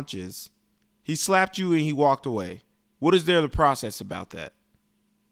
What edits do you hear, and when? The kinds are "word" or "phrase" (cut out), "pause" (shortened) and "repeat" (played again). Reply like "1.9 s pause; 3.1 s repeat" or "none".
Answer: none